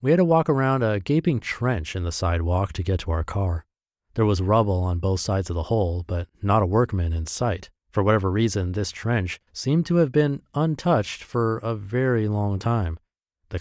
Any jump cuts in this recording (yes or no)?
yes